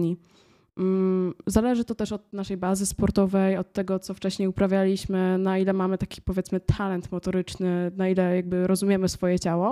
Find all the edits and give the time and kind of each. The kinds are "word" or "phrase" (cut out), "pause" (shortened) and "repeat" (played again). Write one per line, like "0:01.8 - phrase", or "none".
none